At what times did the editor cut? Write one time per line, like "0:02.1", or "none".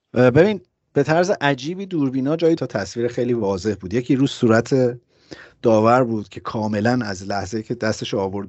0:02.6